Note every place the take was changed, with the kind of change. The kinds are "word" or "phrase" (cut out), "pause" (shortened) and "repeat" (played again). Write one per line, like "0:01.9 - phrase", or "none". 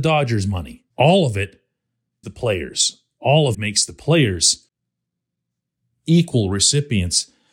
0:00.9 - pause
0:02.2 - word
0:03.5 - word